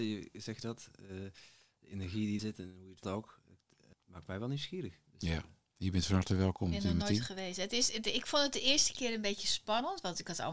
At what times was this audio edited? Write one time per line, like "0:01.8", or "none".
0:02.4
0:03.0
0:03.9